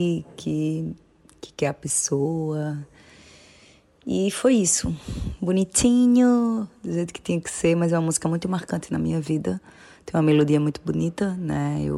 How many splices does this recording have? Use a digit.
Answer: 0